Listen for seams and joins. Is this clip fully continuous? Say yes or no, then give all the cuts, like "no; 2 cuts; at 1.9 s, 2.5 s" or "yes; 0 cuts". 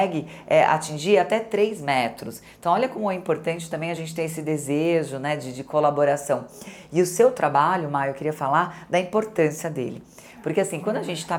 yes; 0 cuts